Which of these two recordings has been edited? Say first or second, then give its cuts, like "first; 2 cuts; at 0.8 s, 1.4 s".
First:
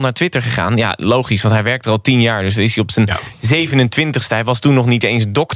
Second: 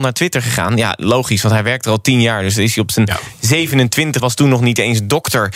second; 1 cut; at 4.2 s